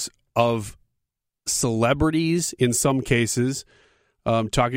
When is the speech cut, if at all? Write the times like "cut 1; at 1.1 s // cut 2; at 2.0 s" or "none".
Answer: none